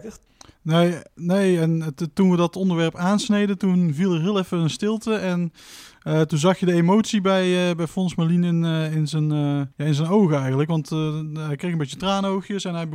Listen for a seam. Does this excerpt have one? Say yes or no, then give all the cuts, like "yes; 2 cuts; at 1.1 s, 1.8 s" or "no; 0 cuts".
yes; 1 cut; at 9.7 s